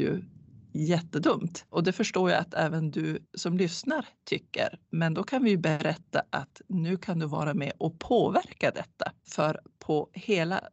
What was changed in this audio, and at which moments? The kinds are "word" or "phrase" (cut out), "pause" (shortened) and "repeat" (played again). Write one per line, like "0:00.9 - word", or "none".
0:03.2 - pause